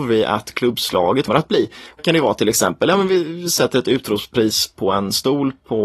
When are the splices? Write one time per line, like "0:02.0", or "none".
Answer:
0:01.3
0:02.0